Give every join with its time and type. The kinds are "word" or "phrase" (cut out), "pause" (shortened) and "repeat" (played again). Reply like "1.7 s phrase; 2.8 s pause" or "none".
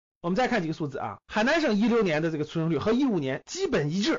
1.2 s pause